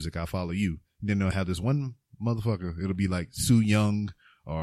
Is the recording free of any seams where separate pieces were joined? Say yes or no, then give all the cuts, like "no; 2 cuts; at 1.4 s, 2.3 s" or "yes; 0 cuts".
yes; 0 cuts